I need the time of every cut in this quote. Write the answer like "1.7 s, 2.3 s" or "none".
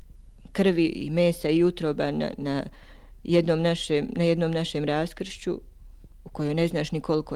2.4 s

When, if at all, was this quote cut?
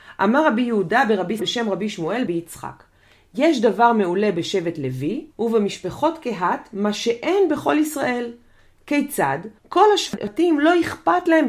1.4 s, 2.3 s, 5.3 s, 9.6 s

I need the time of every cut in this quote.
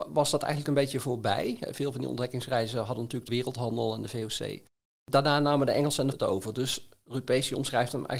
3.3 s, 6.1 s

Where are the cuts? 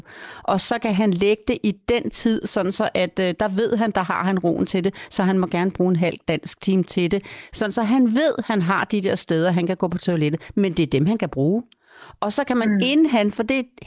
2.4 s

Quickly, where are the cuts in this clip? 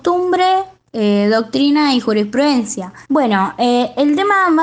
3.0 s

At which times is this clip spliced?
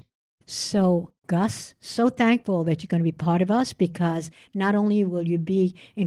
1.2 s

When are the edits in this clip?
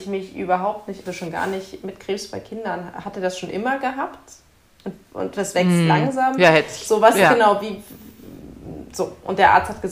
1.1 s

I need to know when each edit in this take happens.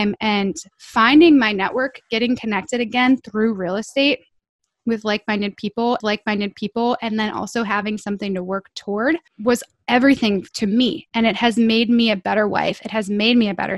6.0 s, 9.3 s, 10.5 s

